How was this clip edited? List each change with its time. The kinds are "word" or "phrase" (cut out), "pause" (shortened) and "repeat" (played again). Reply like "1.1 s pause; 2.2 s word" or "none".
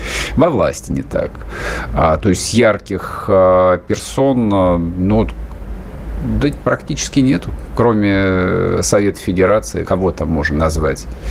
9.8 s word